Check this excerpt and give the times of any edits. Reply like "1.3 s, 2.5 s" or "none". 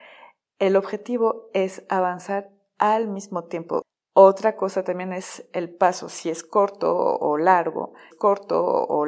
6.2 s, 8.1 s